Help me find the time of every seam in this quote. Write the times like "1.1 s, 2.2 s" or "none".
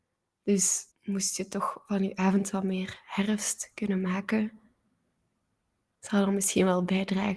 0.9 s